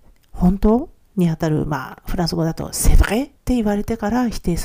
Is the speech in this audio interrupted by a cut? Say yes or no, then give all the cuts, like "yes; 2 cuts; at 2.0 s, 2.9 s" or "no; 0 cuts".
yes; 1 cut; at 3.4 s